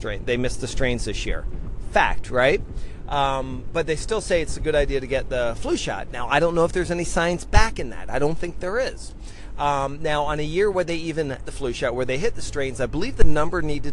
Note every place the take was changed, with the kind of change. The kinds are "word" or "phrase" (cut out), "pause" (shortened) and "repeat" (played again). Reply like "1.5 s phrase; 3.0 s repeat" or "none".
11.4 s word